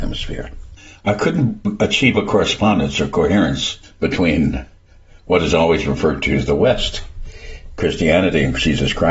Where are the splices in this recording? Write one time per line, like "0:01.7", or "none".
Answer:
0:07.8